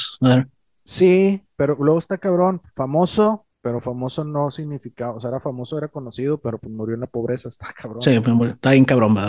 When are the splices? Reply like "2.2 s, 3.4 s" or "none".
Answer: 3.5 s